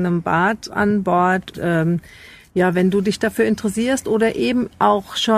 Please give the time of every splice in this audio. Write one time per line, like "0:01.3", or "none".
0:01.5